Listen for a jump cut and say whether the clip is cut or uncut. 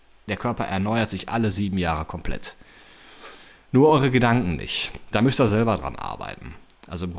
uncut